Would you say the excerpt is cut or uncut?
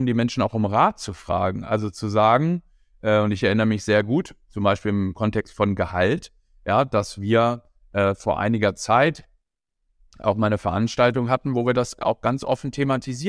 uncut